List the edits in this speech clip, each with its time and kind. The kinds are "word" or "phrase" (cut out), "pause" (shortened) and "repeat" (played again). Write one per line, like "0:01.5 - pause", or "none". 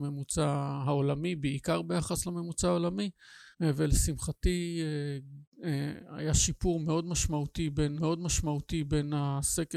0:03.5 - pause
0:08.0 - repeat